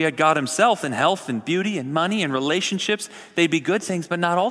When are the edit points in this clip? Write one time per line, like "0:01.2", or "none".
none